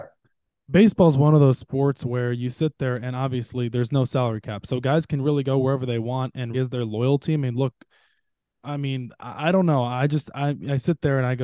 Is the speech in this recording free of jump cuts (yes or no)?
no